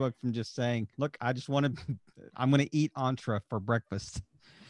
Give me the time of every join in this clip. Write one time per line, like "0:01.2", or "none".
0:00.9